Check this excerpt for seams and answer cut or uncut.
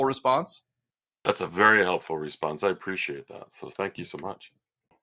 uncut